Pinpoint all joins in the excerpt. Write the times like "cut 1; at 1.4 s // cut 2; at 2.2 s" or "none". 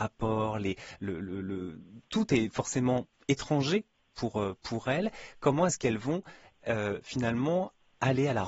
cut 1; at 3.1 s